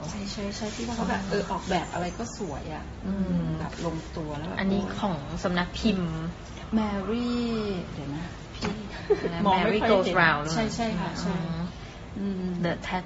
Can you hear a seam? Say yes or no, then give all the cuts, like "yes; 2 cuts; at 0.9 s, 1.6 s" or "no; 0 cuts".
no; 0 cuts